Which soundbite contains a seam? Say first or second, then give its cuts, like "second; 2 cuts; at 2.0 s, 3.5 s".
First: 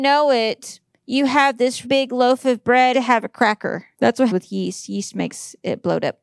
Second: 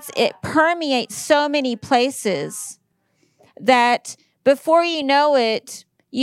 first; 4 cuts; at 1.8 s, 2.9 s, 3.9 s, 4.3 s